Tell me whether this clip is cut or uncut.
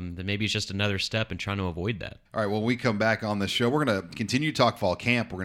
cut